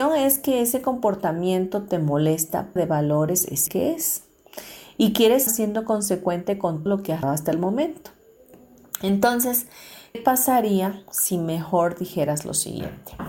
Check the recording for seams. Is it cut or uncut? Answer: cut